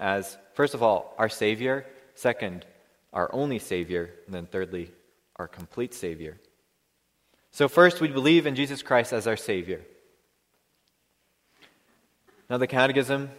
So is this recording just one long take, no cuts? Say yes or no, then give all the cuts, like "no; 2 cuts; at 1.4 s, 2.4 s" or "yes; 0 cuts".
yes; 0 cuts